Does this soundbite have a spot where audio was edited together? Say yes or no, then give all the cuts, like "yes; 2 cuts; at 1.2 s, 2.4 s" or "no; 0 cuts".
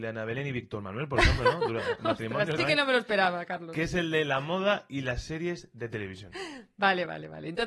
yes; 1 cut; at 2.6 s